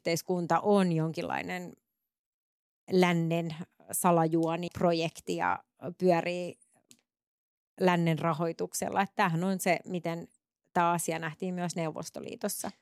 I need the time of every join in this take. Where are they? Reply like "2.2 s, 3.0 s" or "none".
4.7 s